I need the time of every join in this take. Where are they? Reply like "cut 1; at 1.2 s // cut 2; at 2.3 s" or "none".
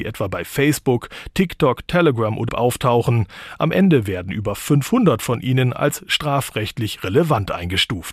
cut 1; at 2.5 s